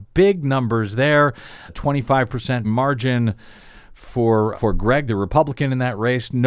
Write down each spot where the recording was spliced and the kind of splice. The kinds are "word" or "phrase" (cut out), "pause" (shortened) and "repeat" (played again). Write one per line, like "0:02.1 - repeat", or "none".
0:01.7 - word
0:02.6 - word
0:04.5 - word
0:05.1 - word